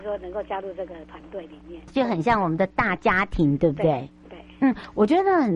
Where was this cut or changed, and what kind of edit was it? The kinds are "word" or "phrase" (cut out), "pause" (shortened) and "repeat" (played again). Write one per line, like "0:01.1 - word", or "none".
0:01.9 - word